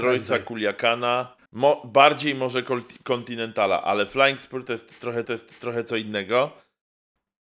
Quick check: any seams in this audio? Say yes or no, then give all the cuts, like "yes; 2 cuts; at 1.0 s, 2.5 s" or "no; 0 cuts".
yes; 2 cuts; at 1.5 s, 5.2 s